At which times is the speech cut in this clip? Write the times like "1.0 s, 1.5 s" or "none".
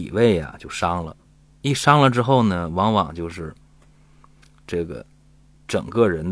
none